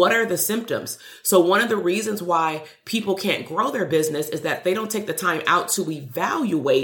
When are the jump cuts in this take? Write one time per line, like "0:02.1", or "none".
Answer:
none